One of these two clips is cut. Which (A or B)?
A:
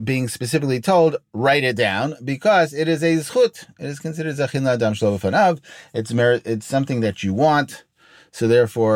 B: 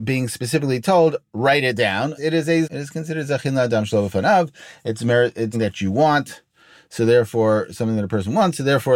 B